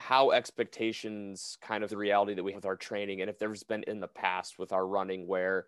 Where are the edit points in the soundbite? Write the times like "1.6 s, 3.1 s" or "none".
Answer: 1.9 s, 2.5 s, 3.8 s

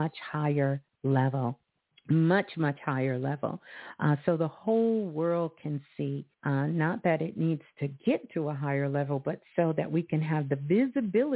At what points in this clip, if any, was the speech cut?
1.7 s, 6.3 s

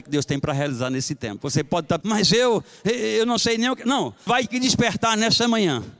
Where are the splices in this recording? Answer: 2.0 s, 4.3 s

